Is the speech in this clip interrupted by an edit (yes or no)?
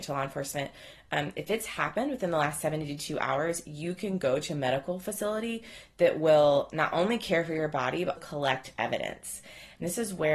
yes